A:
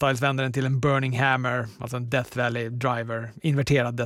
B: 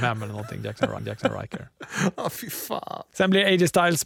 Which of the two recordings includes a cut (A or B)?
B